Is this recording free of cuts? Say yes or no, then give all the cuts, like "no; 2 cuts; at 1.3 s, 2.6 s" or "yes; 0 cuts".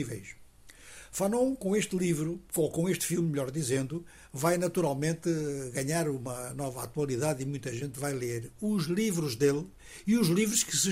yes; 0 cuts